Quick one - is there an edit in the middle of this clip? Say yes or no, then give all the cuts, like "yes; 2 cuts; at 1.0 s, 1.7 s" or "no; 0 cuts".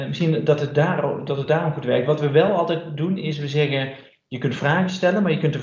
no; 0 cuts